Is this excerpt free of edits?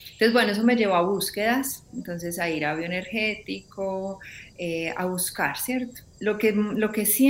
yes; 0 cuts

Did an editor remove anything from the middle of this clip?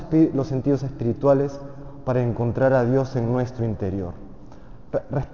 no; 0 cuts

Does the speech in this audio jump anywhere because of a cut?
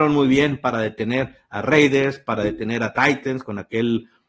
no; 0 cuts

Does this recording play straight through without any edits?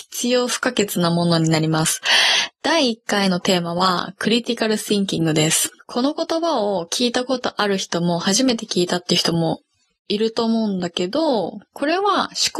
yes; 0 cuts

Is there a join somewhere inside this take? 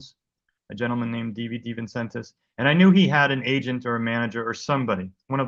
no; 0 cuts

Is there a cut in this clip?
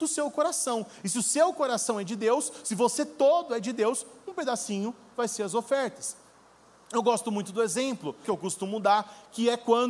yes; 1 cut; at 8.2 s

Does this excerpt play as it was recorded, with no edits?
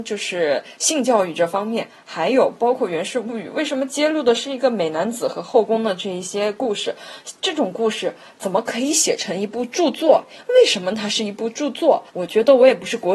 no; 1 cut; at 12.1 s

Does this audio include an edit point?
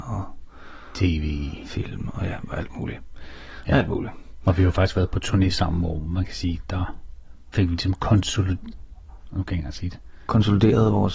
no; 0 cuts

